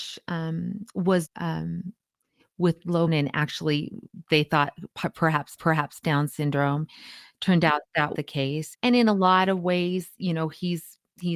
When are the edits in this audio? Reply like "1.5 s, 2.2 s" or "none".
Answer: 1.2 s, 3.1 s, 5.6 s, 8.1 s, 8.7 s